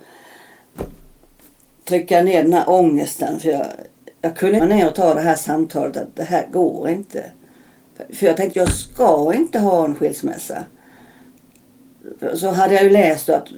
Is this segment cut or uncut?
cut